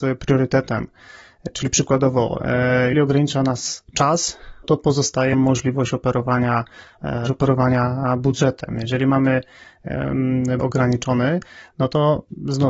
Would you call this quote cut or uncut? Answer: cut